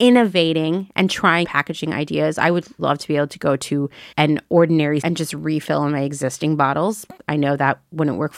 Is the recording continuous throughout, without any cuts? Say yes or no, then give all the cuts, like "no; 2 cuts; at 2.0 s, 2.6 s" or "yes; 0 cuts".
no; 4 cuts; at 1.4 s, 2.8 s, 4.1 s, 5.0 s